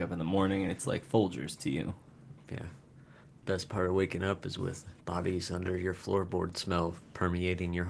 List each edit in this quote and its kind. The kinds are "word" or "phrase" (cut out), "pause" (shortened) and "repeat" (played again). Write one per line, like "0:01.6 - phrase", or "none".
0:05.0 - pause